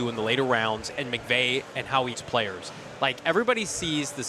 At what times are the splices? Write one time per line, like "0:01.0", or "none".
0:02.1